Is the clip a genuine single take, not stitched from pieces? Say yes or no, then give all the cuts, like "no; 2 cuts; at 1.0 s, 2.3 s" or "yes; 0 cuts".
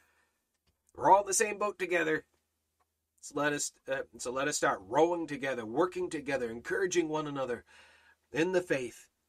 yes; 0 cuts